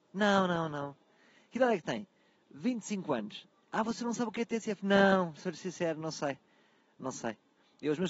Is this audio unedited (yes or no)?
yes